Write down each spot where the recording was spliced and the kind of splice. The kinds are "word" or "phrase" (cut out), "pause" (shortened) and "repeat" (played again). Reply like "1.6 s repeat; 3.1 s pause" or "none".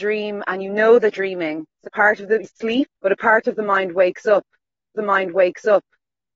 1.1 s word; 1.9 s word; 2.4 s word; 3.0 s pause; 5.0 s repeat